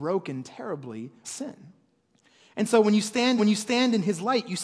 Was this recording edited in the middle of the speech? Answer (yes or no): yes